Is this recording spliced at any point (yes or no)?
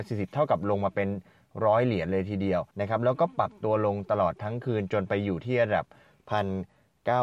yes